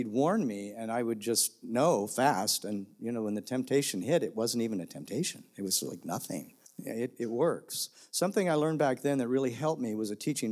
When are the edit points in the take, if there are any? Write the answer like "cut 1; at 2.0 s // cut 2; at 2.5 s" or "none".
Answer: cut 1; at 6.7 s